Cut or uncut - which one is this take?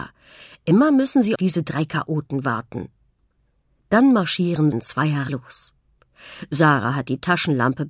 cut